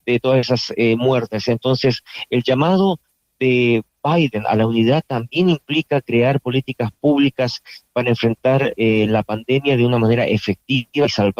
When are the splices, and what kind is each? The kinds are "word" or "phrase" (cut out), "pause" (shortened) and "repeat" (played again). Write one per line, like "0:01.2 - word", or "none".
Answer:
none